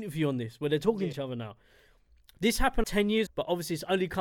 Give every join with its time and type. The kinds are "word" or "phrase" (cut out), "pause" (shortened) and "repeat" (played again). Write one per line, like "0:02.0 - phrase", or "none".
0:01.1 - word
0:02.8 - word
0:03.3 - word